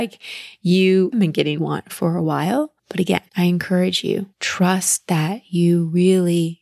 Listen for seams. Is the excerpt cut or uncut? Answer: cut